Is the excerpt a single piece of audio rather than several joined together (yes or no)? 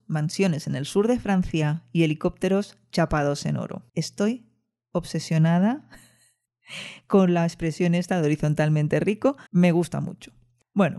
no